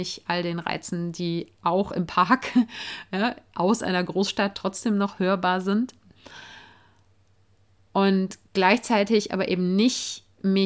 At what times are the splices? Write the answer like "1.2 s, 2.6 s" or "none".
none